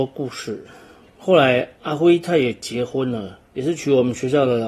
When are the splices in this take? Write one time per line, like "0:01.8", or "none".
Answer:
0:01.8
0:03.5

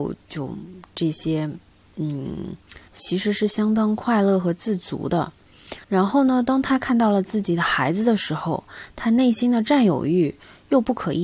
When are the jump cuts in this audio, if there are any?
0:02.9
0:05.8

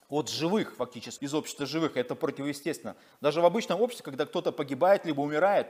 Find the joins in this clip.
0:01.2

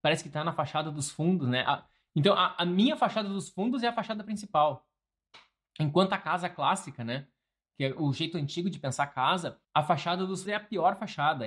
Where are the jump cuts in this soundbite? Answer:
0:09.6
0:10.5

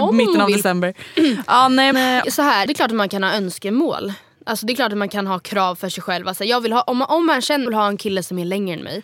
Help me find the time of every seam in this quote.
0:01.9
0:02.2
0:02.7
0:07.7

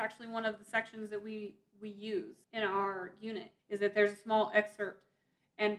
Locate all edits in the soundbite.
0:02.4
0:03.6

